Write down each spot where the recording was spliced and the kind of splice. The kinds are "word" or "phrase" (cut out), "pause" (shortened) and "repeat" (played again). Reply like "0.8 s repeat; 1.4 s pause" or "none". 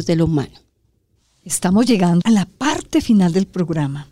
2.2 s word

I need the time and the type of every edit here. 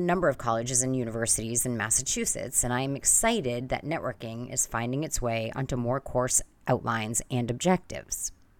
none

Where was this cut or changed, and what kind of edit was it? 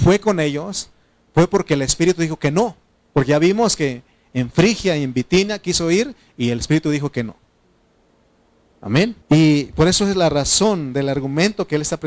9.2 s pause

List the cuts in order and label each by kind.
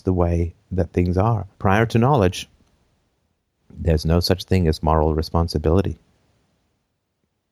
1.5 s pause

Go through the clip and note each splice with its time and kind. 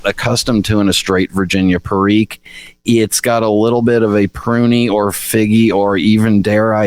none

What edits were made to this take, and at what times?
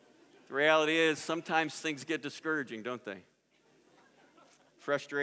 none

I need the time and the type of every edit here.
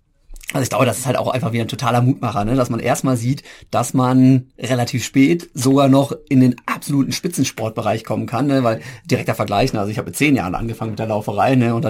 none

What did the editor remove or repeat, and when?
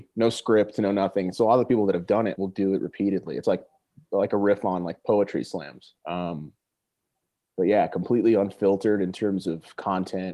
2.4 s word; 3.4 s word; 6.0 s pause

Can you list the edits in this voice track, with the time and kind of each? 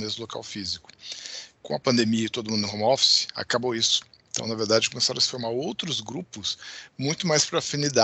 none

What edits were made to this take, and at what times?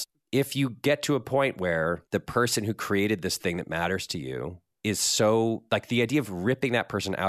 2.1 s pause

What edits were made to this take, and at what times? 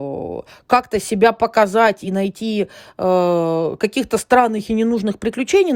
none

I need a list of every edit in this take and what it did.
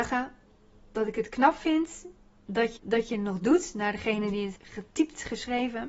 2.8 s word; 4.6 s word

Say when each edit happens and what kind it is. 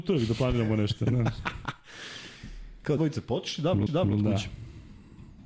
3.0 s phrase; 3.9 s repeat

